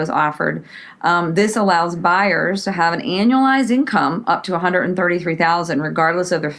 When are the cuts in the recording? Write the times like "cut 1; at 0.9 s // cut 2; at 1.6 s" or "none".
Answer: none